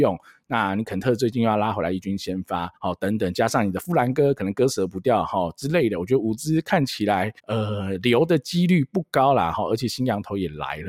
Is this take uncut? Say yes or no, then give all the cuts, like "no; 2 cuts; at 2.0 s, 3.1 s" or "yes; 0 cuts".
no; 2 cuts; at 2.8 s, 7.4 s